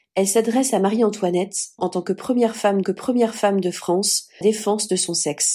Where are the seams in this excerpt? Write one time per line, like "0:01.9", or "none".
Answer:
0:01.8
0:02.8
0:04.4